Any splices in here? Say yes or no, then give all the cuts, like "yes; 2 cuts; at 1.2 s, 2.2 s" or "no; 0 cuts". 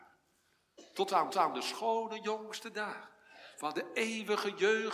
yes; 1 cut; at 1.3 s